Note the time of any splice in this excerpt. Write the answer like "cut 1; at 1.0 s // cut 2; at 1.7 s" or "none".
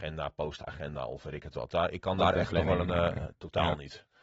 none